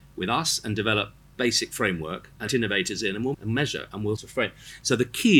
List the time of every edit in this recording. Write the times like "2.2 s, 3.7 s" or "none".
1.3 s, 2.5 s, 3.3 s, 4.2 s